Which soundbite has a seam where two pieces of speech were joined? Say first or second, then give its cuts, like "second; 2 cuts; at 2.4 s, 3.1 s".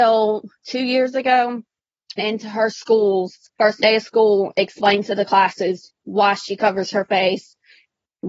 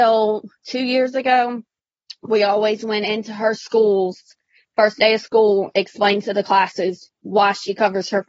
first; 2 cuts; at 2.2 s, 3.5 s